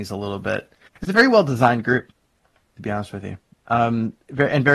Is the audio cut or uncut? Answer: uncut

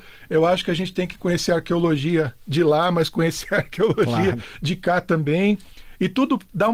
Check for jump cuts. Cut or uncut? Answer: uncut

